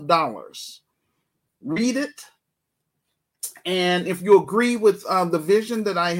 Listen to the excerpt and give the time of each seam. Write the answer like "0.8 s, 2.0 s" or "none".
none